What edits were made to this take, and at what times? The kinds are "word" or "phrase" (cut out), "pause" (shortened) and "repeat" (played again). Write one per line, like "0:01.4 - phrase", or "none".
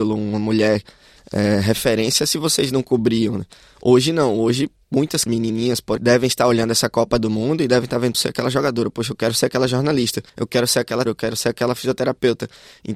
0:05.3 - word
0:06.0 - phrase
0:08.1 - phrase
0:10.3 - pause
0:11.1 - word

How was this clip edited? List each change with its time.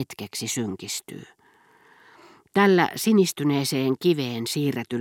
none

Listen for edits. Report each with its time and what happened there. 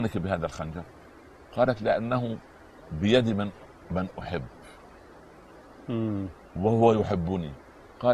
0:03.8 - word

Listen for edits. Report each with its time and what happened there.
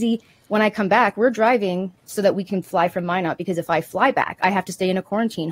0:02.0 - pause

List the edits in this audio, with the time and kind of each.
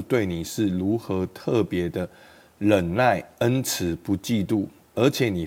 none

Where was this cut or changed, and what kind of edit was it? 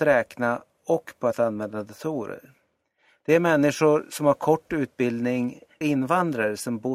0:05.8 - word

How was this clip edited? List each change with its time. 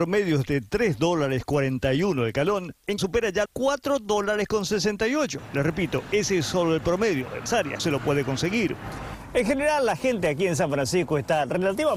0:03.0 - word
0:03.5 - word
0:07.5 - word
0:07.8 - word

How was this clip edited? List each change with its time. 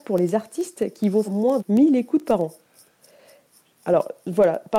0:01.2 - word
0:01.6 - word

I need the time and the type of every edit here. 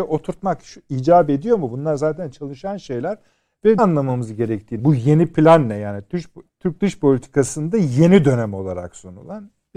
0:03.8 - word
0:04.8 - word
0:06.5 - word

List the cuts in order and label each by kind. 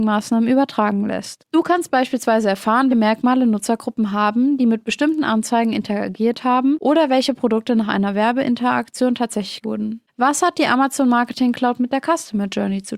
0:02.9 - word
0:09.6 - word

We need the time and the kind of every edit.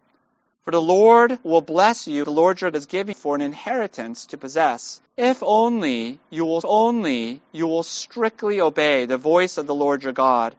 0:02.2 - phrase
0:02.7 - word
0:03.1 - word
0:05.1 - pause
0:06.6 - repeat

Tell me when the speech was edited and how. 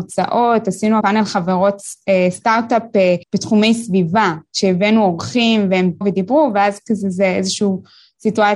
0:01.0 - word
0:03.2 - pause
0:06.0 - word

